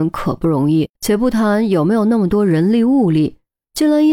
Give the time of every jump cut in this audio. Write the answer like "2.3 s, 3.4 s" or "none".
0.9 s